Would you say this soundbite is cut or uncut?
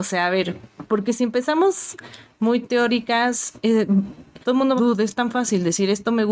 cut